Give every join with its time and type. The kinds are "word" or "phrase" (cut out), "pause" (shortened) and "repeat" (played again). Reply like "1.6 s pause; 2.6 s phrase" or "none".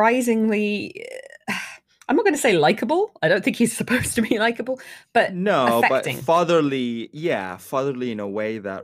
none

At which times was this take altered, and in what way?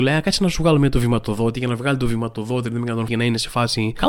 3.1 s word

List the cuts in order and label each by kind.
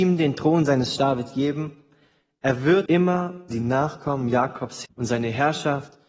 1.0 s word; 2.9 s word; 3.5 s word; 4.9 s word

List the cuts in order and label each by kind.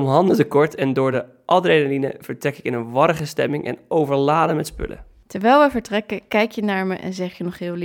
none

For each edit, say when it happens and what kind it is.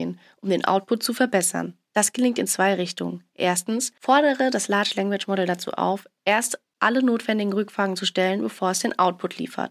none

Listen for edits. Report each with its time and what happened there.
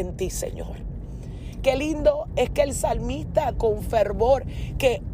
3.5 s word

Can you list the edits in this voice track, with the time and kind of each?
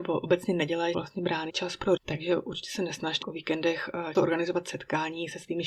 0.9 s word; 1.5 s word; 2.0 s word; 3.2 s word; 4.1 s word

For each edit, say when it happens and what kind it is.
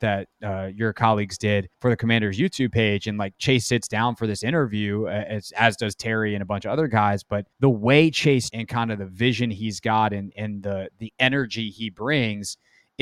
1.7 s pause; 7.5 s pause; 8.5 s phrase

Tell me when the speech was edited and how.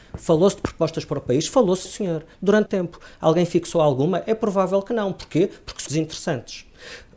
1.8 s word; 2.7 s word; 5.9 s word

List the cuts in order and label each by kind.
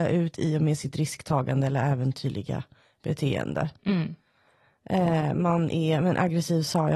none

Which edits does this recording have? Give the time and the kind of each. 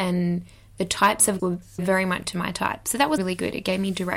1.4 s word; 1.8 s word; 2.2 s word; 3.2 s word

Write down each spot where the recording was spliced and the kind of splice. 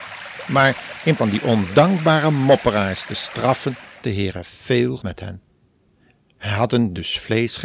1.2 s word; 4.0 s word; 5.0 s word

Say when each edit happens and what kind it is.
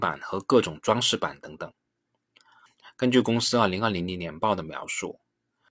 none

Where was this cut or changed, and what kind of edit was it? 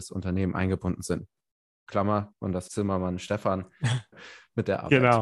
2.3 s word; 2.7 s word; 4.1 s word

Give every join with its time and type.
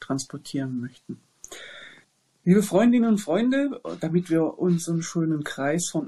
2.0 s pause

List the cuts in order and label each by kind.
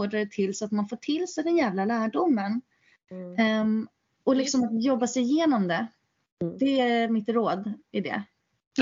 none

